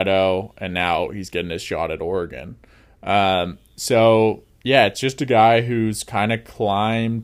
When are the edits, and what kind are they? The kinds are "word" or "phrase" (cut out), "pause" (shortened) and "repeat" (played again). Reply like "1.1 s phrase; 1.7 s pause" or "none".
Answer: none